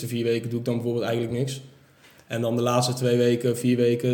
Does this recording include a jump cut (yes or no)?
no